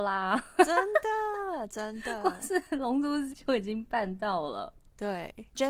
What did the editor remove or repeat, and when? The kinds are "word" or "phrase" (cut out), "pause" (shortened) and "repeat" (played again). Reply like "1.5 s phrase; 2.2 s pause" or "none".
3.3 s word